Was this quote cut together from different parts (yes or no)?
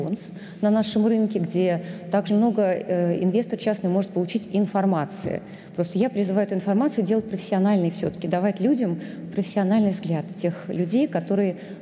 yes